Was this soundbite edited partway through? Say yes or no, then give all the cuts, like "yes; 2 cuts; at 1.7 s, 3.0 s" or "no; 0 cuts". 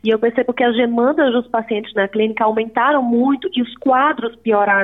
no; 0 cuts